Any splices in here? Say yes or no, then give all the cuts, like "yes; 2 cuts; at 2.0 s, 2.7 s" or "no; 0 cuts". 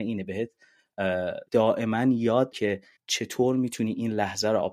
yes; 3 cuts; at 1.5 s, 2.5 s, 3.0 s